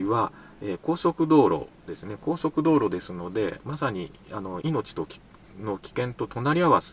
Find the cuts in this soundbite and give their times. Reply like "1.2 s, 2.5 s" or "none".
4.6 s